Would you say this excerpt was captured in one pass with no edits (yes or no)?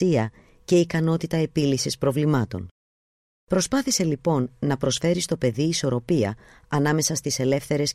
yes